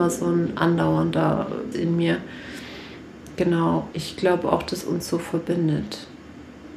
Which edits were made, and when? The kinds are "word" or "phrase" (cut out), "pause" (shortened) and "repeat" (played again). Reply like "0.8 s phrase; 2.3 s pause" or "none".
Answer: 1.7 s word; 3.9 s word; 4.8 s word